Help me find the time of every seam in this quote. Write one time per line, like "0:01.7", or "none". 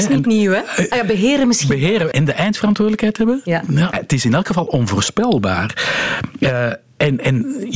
0:02.1
0:03.9